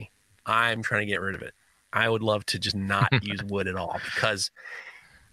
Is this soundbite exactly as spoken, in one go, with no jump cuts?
yes; 0 cuts

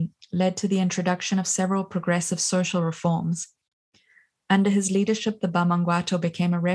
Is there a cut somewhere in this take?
no; 0 cuts

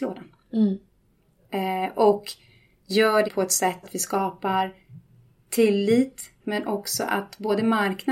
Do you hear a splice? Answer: yes; 3 cuts; at 3.2 s, 3.8 s, 6.4 s

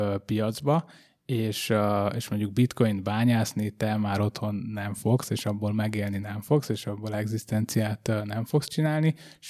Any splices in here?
no; 0 cuts

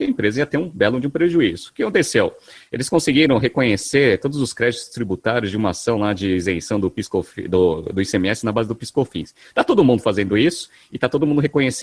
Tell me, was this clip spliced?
no; 0 cuts

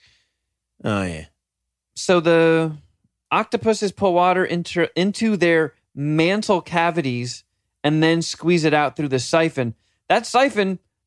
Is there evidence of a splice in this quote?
no; 0 cuts

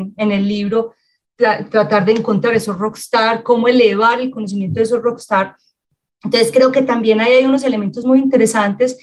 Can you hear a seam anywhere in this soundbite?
no; 0 cuts

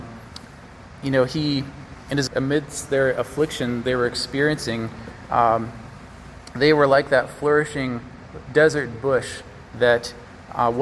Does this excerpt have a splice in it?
yes; 1 cut; at 2.3 s

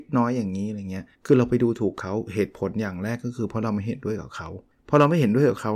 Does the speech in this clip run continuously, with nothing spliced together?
no; 2 cuts; at 1.1 s, 4.7 s

